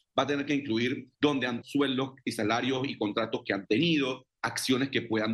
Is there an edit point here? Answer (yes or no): yes